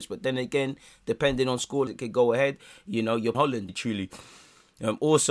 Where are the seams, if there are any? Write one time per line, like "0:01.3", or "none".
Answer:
0:01.9
0:03.3
0:03.7